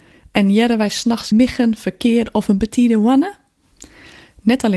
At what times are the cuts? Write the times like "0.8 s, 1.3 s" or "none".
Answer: 1.3 s